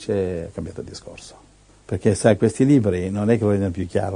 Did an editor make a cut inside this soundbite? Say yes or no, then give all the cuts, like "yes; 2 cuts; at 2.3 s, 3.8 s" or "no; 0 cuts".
yes; 1 cut; at 1.7 s